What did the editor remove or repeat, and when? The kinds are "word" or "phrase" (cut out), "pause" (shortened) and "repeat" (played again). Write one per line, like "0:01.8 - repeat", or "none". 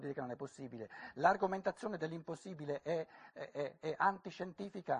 none

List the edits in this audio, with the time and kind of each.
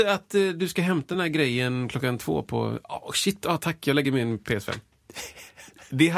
none

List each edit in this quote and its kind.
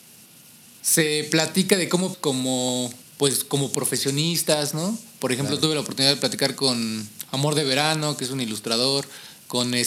0:02.1 - phrase
0:03.0 - pause

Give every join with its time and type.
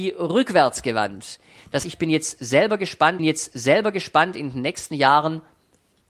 0:01.8 - word
0:03.2 - repeat

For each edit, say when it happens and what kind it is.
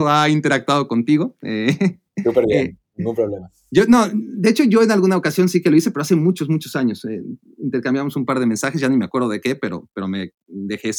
none

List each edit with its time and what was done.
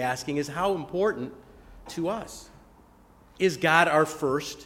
0:01.9 - phrase

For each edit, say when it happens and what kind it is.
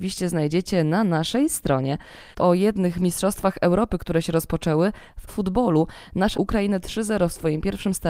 0:02.4 - word
0:05.3 - word
0:06.3 - phrase

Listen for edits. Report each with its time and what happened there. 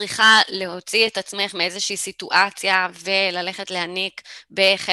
none

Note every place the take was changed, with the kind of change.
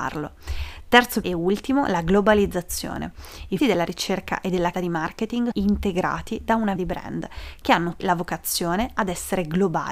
0:01.2 - word
0:03.6 - word
0:04.7 - word
0:05.5 - word
0:06.8 - word
0:08.0 - word

